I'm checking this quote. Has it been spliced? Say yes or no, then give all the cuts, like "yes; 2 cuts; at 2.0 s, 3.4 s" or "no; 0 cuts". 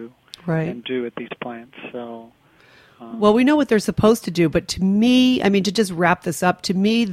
no; 0 cuts